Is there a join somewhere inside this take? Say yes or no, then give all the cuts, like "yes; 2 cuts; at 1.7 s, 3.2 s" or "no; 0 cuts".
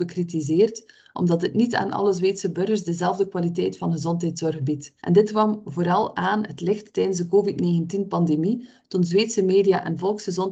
yes; 1 cut; at 5.0 s